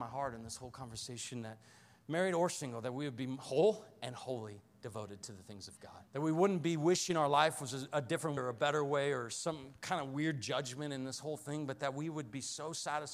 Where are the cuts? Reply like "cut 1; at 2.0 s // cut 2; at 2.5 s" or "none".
cut 1; at 6.1 s // cut 2; at 8.4 s